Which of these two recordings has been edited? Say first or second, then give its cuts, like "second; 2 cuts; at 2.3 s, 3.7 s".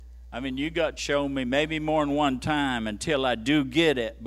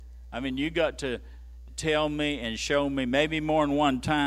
first; 1 cut; at 1.0 s